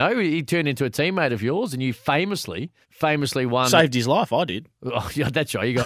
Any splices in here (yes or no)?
yes